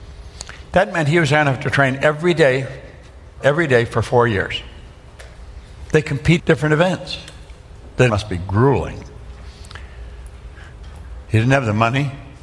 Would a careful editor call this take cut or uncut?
cut